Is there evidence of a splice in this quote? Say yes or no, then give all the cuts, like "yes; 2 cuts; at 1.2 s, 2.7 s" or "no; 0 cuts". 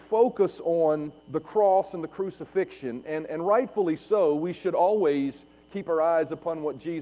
yes; 1 cut; at 1.2 s